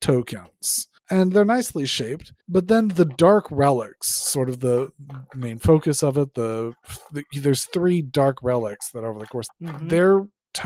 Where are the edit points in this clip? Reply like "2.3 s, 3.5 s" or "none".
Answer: 1.0 s, 2.4 s, 9.5 s